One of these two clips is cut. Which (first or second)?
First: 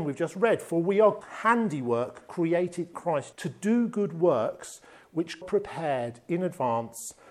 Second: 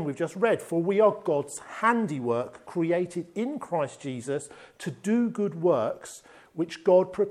first